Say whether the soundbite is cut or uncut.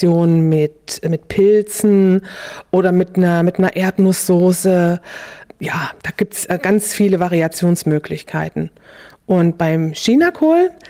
uncut